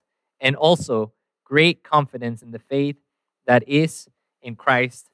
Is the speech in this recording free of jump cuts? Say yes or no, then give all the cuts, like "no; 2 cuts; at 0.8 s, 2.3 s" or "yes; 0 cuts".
yes; 0 cuts